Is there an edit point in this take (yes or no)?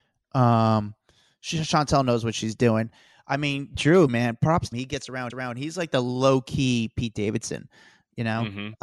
yes